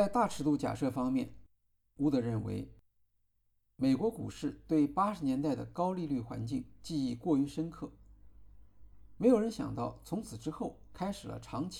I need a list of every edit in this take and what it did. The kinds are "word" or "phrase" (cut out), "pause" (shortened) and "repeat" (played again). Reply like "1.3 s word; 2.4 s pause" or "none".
none